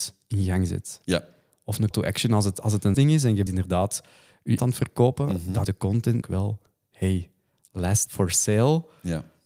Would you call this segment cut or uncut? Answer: cut